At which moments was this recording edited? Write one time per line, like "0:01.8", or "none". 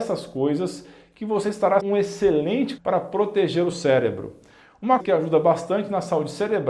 0:01.8
0:02.8
0:03.7
0:05.0